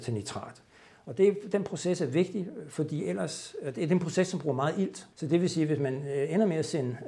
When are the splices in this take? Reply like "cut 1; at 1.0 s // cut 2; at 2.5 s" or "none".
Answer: cut 1; at 5.1 s